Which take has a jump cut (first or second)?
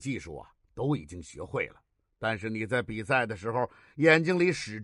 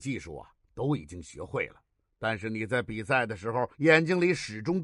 second